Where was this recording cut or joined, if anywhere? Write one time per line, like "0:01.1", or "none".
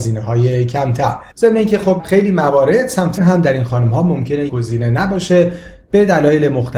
0:01.3
0:02.0
0:03.2
0:04.5